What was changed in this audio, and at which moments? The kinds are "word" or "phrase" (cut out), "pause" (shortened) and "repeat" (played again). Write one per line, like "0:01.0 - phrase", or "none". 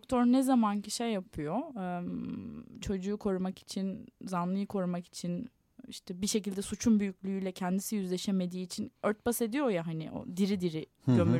0:09.0 - pause